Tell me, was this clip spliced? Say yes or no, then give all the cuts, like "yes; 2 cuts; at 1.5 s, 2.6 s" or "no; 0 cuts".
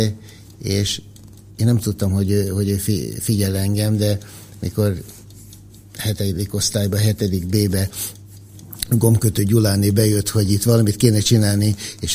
no; 0 cuts